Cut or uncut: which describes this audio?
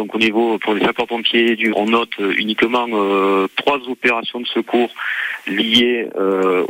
cut